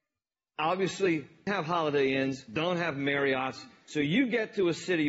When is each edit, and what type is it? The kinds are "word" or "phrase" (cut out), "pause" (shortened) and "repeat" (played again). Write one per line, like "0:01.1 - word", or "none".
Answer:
0:01.5 - word